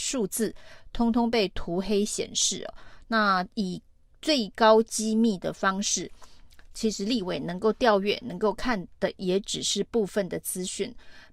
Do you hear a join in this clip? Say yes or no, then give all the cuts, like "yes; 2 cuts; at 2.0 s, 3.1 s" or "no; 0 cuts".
no; 0 cuts